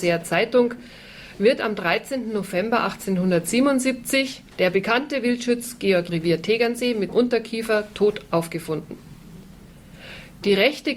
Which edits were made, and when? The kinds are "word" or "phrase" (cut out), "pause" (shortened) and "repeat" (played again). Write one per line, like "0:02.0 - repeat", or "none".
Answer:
0:04.5 - pause
0:06.1 - phrase
0:07.1 - word